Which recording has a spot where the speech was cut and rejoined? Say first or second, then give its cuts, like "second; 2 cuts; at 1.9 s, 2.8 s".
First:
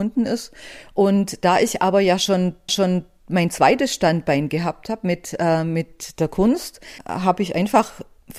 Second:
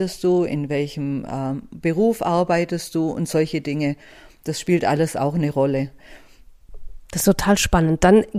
first; 2 cuts; at 2.7 s, 7.0 s